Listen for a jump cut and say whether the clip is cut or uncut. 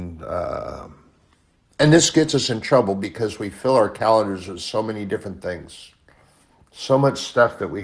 cut